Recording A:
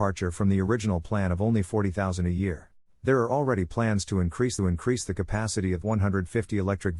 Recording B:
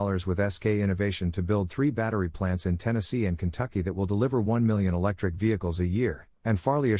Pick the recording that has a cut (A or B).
A